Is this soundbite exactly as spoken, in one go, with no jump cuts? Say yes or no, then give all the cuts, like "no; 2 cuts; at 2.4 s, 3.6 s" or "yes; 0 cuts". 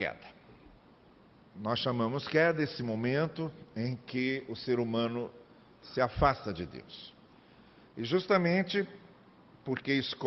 yes; 0 cuts